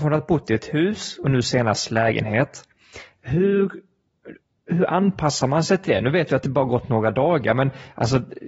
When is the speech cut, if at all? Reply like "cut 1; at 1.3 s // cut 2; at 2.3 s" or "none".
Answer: none